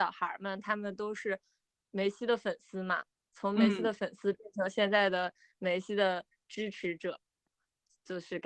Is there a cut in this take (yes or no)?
no